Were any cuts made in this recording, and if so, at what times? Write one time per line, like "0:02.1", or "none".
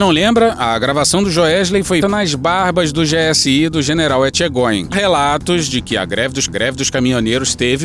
0:02.0
0:04.9
0:06.5